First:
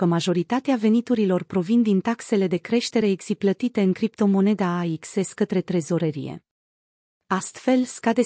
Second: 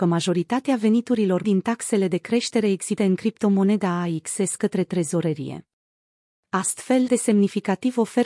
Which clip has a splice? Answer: second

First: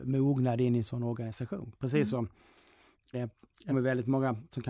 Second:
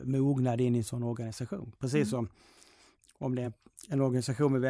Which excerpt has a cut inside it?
first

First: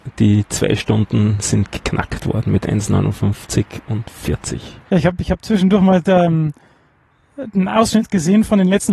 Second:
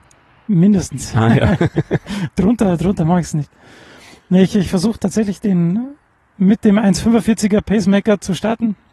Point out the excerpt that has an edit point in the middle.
first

